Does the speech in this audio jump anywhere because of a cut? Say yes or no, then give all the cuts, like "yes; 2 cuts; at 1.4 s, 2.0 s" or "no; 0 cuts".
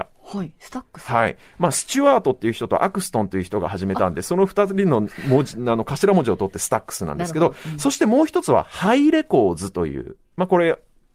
yes; 1 cut; at 10.2 s